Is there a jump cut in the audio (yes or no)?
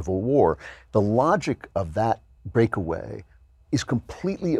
no